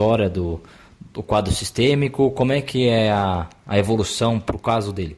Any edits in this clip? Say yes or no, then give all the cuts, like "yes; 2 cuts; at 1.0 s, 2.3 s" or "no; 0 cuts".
no; 0 cuts